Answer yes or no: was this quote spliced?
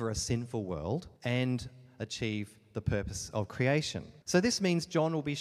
yes